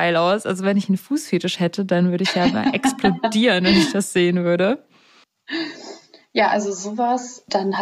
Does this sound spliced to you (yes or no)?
no